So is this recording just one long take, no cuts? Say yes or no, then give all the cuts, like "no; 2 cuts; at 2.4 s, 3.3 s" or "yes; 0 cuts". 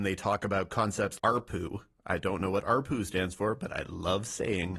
no; 1 cut; at 1.2 s